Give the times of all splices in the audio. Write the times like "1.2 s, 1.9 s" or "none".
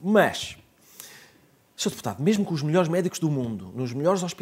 none